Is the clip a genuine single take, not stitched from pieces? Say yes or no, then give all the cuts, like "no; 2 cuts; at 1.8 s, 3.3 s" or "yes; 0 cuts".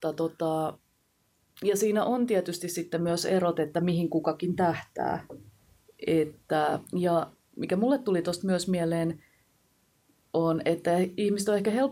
no; 1 cut; at 6.9 s